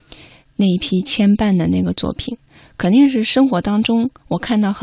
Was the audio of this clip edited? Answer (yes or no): no